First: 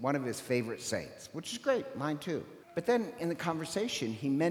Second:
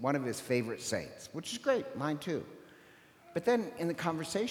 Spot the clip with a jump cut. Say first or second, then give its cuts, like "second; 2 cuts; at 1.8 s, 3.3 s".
first; 1 cut; at 2.6 s